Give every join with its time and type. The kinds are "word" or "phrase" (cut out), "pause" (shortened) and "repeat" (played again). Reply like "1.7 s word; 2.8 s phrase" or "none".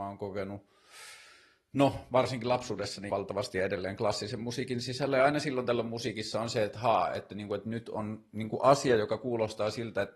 3.1 s word